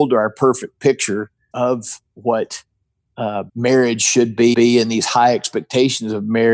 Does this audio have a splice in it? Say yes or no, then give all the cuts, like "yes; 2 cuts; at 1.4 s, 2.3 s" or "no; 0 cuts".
yes; 3 cuts; at 1.5 s, 3.5 s, 4.5 s